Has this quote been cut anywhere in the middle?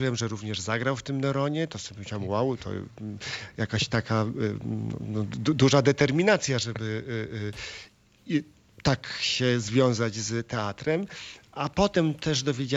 no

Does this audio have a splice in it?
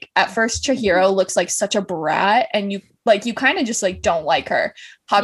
no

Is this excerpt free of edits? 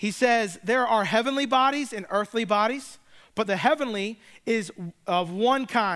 no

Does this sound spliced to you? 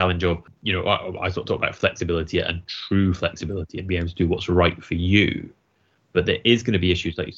no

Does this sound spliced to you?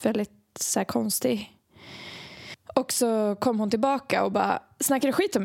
no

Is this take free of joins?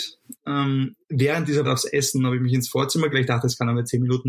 no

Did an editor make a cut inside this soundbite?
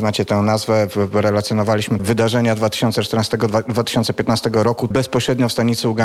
yes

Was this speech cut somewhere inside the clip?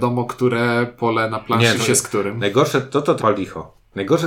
yes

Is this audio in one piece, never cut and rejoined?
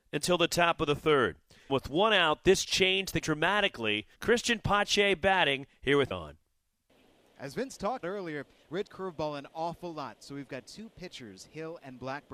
no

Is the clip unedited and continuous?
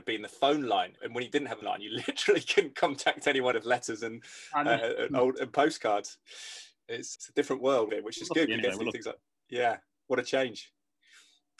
no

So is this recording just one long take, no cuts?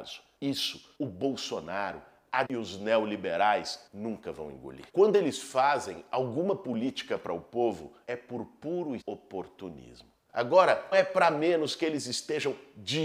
no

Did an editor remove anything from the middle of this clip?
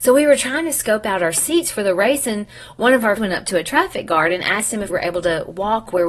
yes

